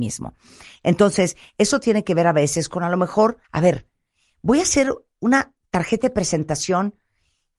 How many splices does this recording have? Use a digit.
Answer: 1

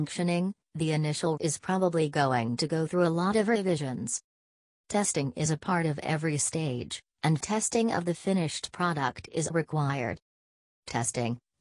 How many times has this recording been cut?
3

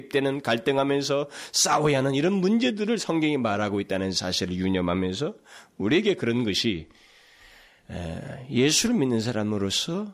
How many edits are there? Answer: 0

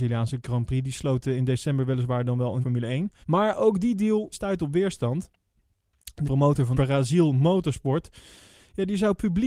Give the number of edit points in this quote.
5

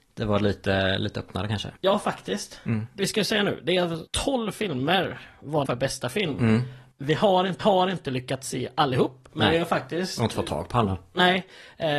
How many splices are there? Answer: 5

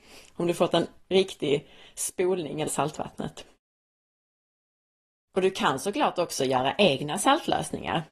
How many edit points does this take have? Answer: 1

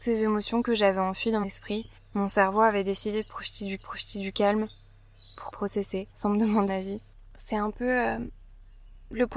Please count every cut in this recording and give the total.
6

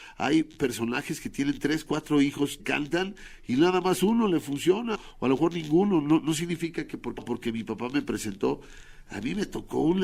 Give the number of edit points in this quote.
3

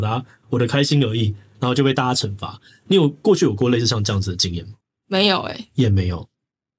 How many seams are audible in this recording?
1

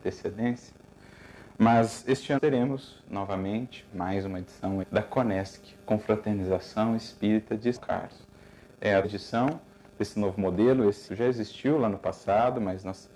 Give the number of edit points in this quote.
6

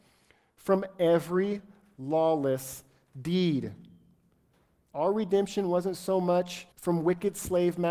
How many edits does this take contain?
1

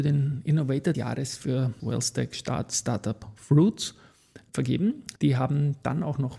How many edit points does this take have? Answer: 4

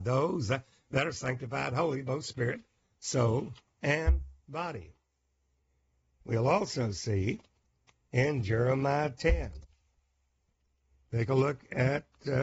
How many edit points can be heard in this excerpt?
0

